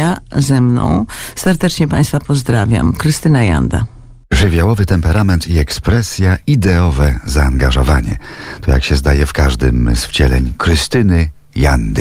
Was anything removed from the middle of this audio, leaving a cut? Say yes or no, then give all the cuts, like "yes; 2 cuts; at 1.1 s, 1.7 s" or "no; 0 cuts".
no; 0 cuts